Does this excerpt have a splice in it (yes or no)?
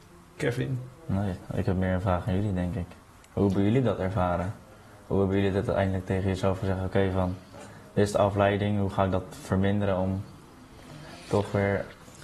no